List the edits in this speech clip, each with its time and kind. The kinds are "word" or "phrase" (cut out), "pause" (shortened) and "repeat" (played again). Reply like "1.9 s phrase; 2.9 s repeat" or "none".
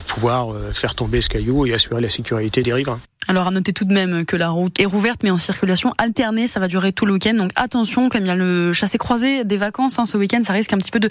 4.8 s word